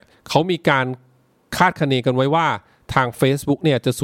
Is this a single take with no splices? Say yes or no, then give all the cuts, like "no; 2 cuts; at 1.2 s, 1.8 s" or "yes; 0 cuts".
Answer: yes; 0 cuts